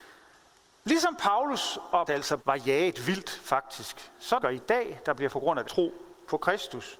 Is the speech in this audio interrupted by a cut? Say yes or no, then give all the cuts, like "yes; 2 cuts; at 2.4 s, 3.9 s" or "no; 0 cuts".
yes; 5 cuts; at 2.1 s, 2.4 s, 4.4 s, 5.3 s, 5.6 s